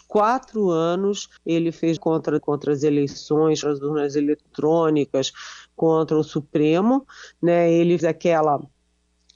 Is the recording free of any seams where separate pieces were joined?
no; 5 cuts; at 1.4 s, 2.0 s, 2.4 s, 3.6 s, 8.0 s

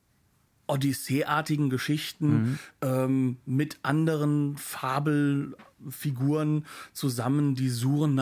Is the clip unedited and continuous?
yes; 0 cuts

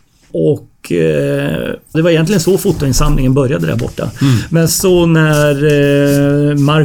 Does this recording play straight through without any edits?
no; 2 cuts; at 1.9 s, 4.7 s

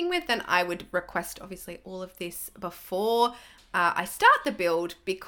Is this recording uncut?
yes; 0 cuts

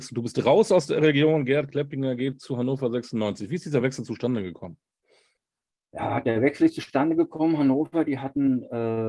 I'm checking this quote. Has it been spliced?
no; 0 cuts

